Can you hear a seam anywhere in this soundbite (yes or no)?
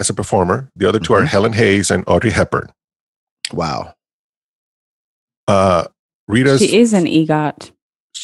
no